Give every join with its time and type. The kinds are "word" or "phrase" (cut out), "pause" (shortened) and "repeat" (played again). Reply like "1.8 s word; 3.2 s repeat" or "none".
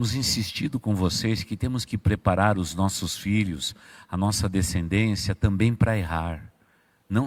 none